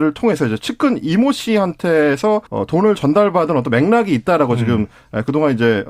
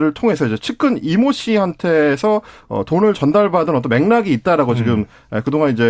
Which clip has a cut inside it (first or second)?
first